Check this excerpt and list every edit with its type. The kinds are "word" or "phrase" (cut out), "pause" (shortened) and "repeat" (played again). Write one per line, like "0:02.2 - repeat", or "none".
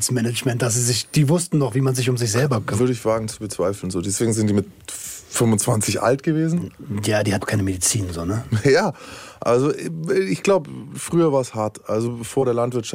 0:07.4 - word